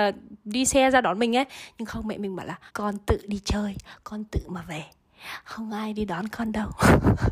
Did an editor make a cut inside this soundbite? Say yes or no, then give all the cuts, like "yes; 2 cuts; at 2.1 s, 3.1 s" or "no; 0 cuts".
yes; 1 cut; at 2.7 s